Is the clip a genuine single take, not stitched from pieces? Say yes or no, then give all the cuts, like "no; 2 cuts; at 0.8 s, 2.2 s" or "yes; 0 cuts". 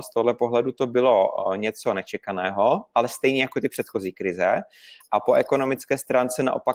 yes; 0 cuts